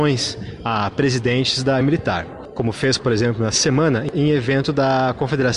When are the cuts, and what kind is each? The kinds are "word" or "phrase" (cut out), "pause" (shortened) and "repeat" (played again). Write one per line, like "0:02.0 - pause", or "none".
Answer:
0:01.8 - word